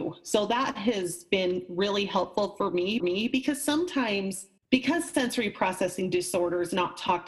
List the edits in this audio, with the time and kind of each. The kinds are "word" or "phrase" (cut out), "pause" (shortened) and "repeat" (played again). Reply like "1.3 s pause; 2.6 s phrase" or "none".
3.0 s repeat; 4.6 s pause